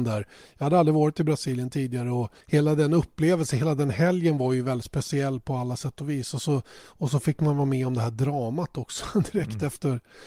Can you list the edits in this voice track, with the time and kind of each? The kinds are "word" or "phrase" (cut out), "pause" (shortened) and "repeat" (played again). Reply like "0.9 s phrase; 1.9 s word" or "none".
2.4 s pause